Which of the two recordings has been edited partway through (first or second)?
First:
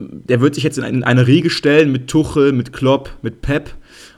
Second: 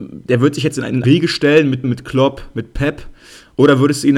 second